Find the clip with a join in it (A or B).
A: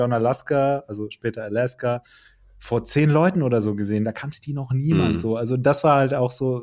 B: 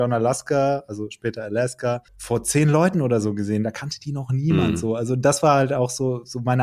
B